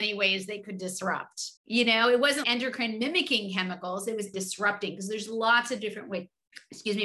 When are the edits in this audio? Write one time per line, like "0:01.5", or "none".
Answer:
0:01.6
0:02.4
0:04.3